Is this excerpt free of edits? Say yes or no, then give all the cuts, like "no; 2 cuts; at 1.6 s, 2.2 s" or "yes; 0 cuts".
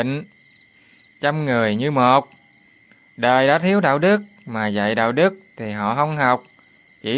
yes; 0 cuts